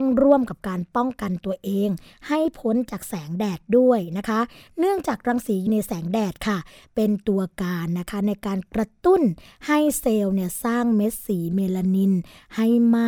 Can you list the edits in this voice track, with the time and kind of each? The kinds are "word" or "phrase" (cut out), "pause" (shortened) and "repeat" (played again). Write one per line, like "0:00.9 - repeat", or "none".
0:05.7 - word

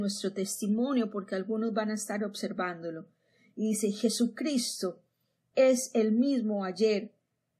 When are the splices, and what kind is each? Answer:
none

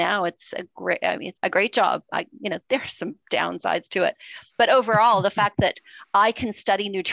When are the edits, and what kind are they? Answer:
0:01.4 - word
0:02.6 - pause

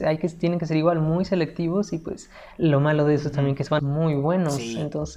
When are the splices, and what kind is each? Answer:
0:03.8 - phrase

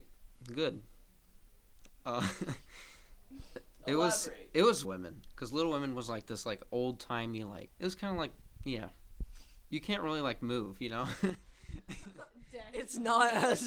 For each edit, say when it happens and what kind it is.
0:04.8 - phrase

